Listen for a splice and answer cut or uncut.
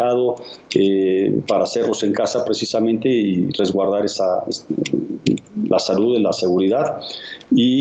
uncut